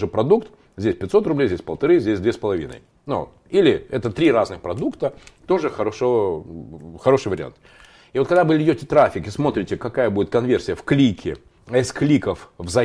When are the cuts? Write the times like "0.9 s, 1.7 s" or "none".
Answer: none